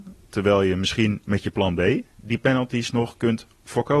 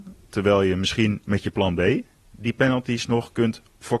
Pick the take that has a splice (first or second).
first